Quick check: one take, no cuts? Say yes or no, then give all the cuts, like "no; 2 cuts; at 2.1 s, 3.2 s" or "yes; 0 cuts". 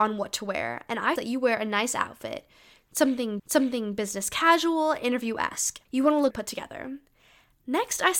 no; 4 cuts; at 1.2 s, 3.4 s, 5.9 s, 6.3 s